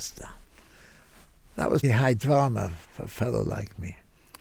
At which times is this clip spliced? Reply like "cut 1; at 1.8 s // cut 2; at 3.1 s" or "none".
cut 1; at 1.8 s // cut 2; at 2.8 s